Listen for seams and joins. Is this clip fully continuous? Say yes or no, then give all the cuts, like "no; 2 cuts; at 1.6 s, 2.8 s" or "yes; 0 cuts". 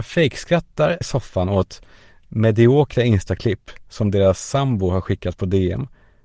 no; 1 cut; at 1.0 s